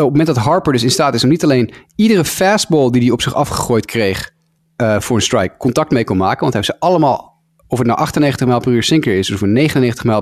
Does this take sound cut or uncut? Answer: cut